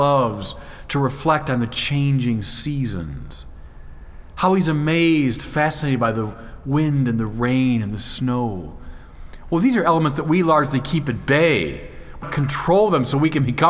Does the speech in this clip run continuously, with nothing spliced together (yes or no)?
no